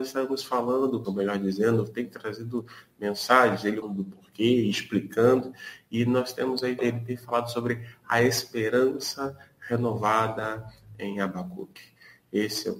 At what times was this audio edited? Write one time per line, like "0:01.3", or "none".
0:01.0
0:03.8
0:06.8

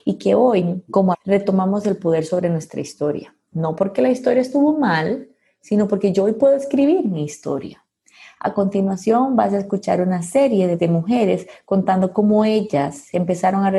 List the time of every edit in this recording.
0:01.1
0:10.8

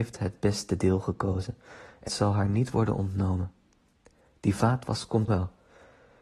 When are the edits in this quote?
0:02.1
0:05.3

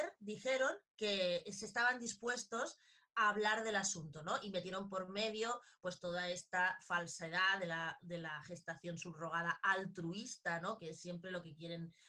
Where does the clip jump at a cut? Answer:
none

